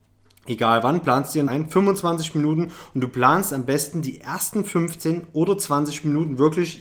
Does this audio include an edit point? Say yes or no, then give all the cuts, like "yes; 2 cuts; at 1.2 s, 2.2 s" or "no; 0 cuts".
yes; 1 cut; at 1.5 s